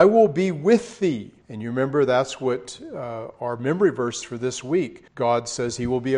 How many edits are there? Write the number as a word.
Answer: three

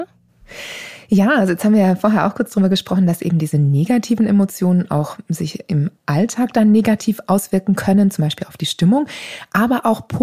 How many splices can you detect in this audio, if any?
one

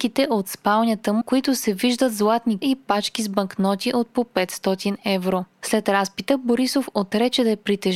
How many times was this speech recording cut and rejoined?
two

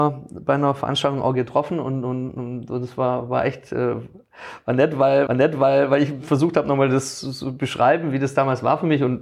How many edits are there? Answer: one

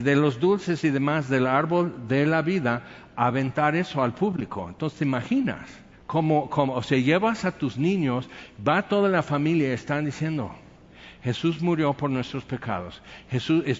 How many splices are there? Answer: one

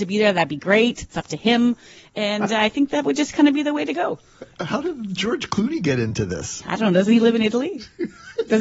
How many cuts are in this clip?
zero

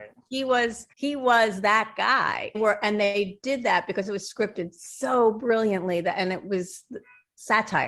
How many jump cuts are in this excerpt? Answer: two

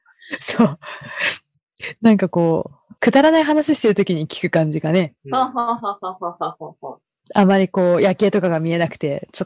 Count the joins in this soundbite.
two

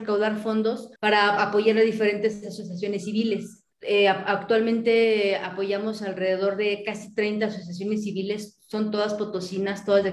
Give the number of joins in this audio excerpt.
two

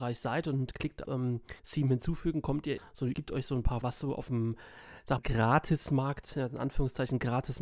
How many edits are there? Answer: six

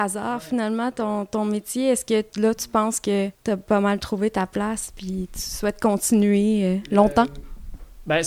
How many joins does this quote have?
one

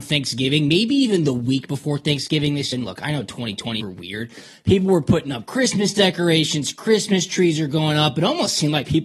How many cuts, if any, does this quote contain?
two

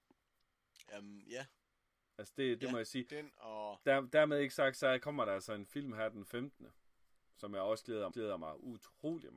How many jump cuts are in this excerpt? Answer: one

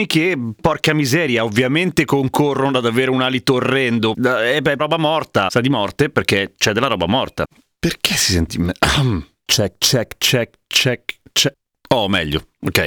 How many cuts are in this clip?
two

